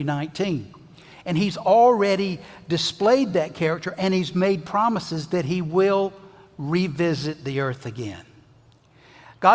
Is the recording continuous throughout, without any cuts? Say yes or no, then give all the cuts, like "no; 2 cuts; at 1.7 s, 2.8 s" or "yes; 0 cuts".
yes; 0 cuts